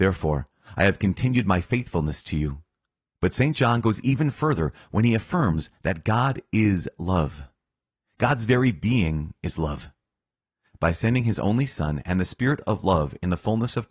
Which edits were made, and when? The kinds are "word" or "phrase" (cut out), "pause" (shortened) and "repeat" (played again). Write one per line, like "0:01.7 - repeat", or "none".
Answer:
none